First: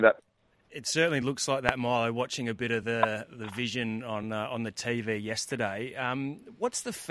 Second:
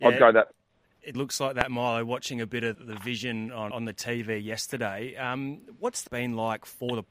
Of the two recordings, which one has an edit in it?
second; 4 cuts; at 1.1 s, 2.7 s, 3.7 s, 6.1 s

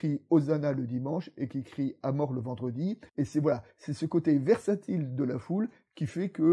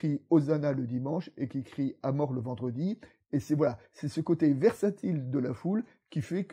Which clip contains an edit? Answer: first; 1 cut; at 3.1 s

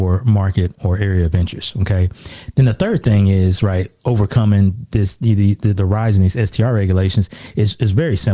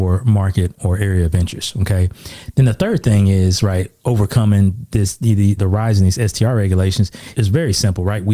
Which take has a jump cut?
second; 2 cuts; at 5.6 s, 7.3 s

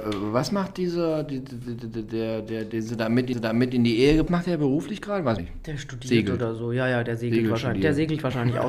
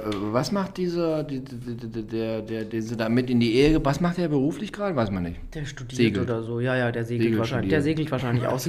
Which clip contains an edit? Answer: first; 3 cuts; at 3.3 s, 4.3 s, 5.4 s

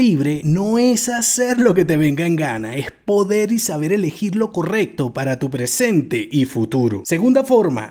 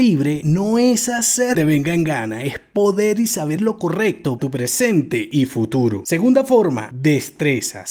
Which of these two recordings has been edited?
second; 3 cuts; at 1.5 s, 3.6 s, 4.4 s

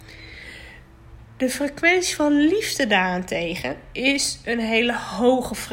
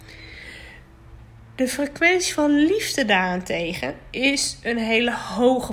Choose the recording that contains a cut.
first; 1 cut; at 1.2 s

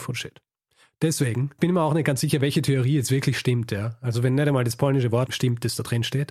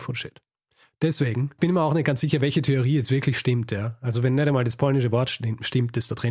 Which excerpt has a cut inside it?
first; 1 cut; at 5.3 s

